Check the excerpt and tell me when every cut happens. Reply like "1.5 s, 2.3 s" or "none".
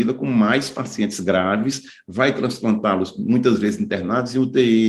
none